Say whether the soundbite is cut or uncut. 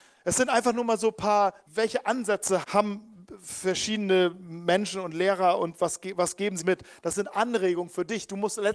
cut